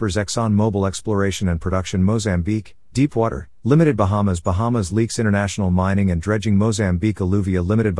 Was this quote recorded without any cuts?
yes; 0 cuts

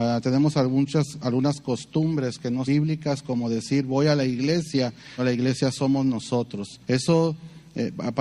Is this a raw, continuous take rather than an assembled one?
no; 3 cuts; at 2.7 s, 5.2 s, 6.8 s

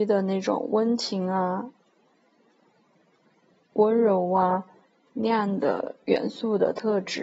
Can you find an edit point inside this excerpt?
no; 0 cuts

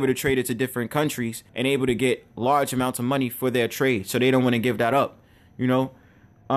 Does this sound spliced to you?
yes; 1 cut; at 1.5 s

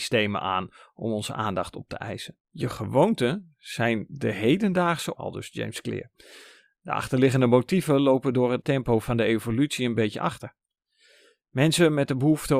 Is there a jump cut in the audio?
yes; 3 cuts; at 2.4 s, 5.1 s, 8.6 s

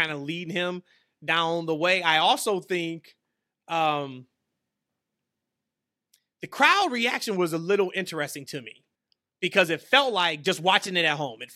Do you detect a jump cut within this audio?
yes; 1 cut; at 9.0 s

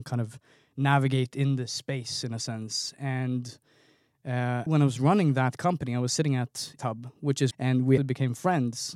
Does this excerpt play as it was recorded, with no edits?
no; 4 cuts; at 4.7 s, 6.8 s, 7.5 s, 8.0 s

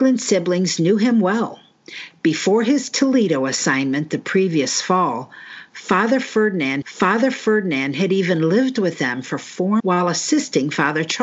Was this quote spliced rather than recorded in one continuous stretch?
yes; 2 cuts; at 6.8 s, 9.8 s

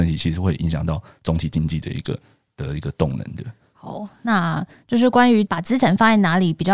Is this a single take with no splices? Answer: yes; 0 cuts

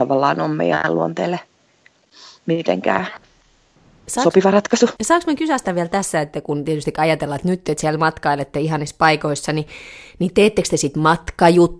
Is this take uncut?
yes; 0 cuts

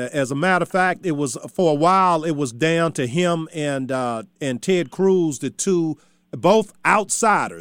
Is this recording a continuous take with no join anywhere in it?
yes; 0 cuts

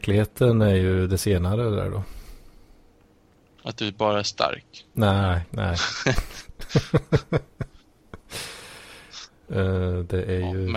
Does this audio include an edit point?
no; 0 cuts

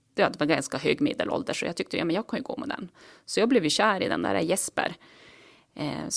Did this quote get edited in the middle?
no; 0 cuts

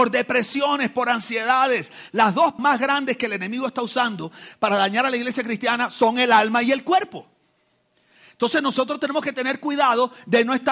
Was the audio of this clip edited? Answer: yes; 1 cut; at 2.6 s

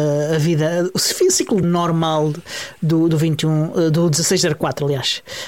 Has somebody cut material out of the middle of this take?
yes; 1 cut; at 1.6 s

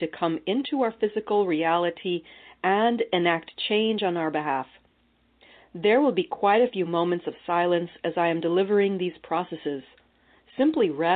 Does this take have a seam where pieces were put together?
no; 0 cuts

